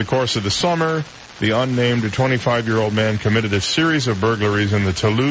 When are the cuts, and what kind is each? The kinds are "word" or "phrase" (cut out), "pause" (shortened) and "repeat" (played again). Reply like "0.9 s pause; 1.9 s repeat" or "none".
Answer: none